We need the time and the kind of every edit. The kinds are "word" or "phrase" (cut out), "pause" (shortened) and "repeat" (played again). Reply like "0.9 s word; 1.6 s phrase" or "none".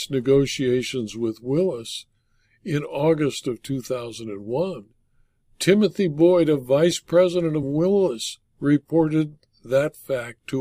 none